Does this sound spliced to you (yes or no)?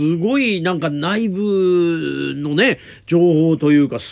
no